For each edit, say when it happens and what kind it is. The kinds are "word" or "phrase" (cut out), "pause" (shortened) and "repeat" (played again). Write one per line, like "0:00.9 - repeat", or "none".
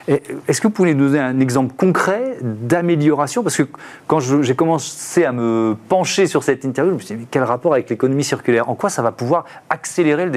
none